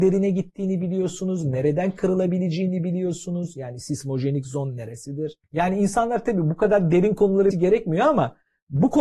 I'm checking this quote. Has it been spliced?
yes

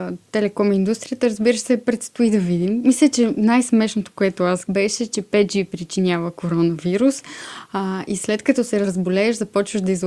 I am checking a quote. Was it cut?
yes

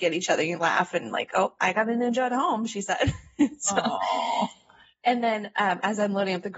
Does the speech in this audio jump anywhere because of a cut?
no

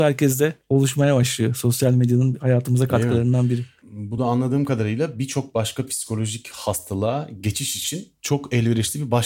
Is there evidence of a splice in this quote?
no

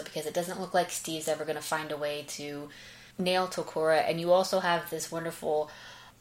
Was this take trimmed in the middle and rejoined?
yes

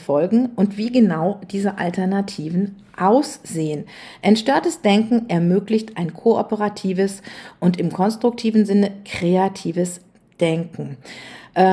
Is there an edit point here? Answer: no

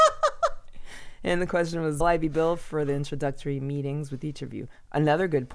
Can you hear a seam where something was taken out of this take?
yes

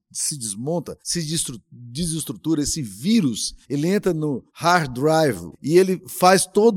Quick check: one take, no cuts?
no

